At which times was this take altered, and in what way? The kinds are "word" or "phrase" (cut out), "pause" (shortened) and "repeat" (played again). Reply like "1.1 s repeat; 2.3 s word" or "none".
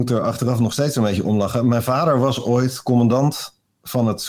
none